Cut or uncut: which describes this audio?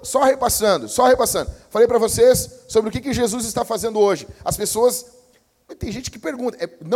uncut